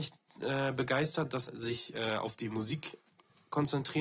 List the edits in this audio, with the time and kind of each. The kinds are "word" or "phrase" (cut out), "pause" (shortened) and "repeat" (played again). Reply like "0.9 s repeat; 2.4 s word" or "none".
1.5 s word